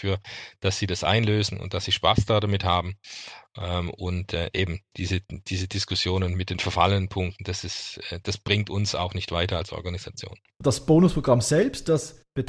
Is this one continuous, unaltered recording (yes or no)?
yes